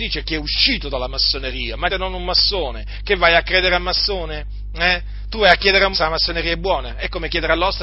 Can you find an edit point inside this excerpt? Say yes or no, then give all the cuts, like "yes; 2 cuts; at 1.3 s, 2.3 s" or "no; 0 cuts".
yes; 2 cuts; at 1.9 s, 5.9 s